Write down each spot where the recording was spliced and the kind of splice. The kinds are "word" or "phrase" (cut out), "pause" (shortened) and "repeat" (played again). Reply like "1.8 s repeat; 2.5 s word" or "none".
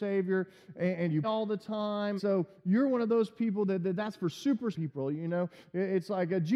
1.2 s word; 2.2 s phrase; 4.7 s word